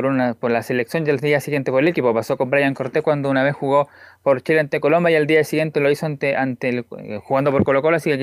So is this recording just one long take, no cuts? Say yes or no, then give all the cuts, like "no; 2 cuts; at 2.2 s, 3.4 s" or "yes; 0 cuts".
yes; 0 cuts